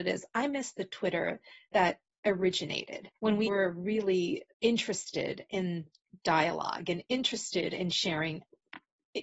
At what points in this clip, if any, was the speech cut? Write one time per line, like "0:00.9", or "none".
0:03.2
0:03.5
0:04.5